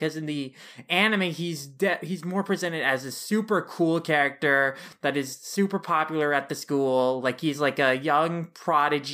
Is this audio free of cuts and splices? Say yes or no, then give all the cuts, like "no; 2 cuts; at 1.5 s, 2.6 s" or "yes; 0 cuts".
yes; 0 cuts